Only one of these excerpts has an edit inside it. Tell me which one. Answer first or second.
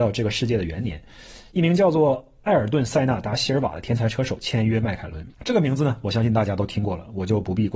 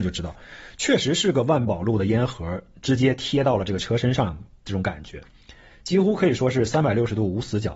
first